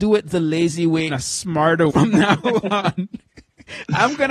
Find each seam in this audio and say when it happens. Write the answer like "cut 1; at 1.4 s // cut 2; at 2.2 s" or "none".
cut 1; at 1.1 s // cut 2; at 1.9 s